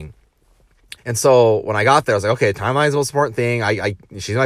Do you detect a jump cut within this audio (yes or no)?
yes